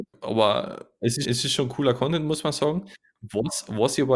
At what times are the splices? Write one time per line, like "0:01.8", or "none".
0:01.2

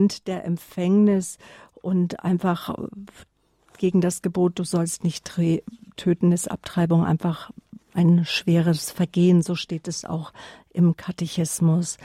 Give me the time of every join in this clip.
none

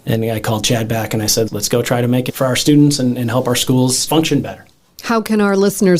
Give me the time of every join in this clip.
0:01.5
0:02.3
0:04.1

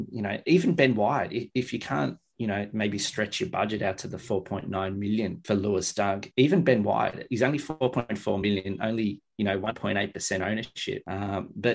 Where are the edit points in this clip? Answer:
none

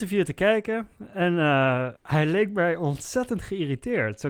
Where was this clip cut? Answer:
0:02.0

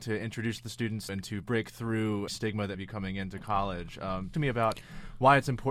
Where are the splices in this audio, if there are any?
0:01.1
0:02.3
0:02.7
0:04.3

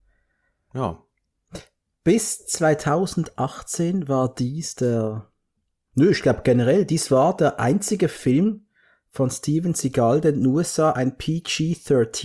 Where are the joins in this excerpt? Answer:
none

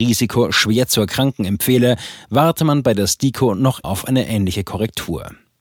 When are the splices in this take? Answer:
0:03.8

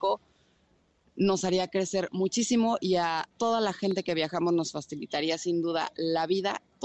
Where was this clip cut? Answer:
0:03.3

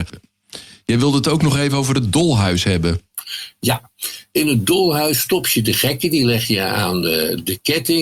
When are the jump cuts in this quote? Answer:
none

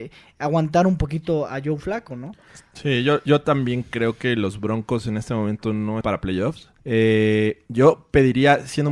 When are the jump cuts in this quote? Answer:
0:06.0
0:06.8

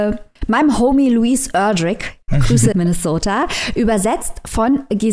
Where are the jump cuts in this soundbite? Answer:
0:02.2
0:02.7

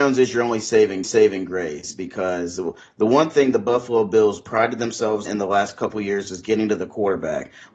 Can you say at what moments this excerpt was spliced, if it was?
0:01.0
0:05.3

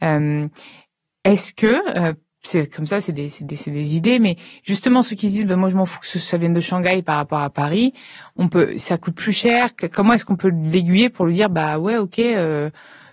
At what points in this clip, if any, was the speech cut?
none

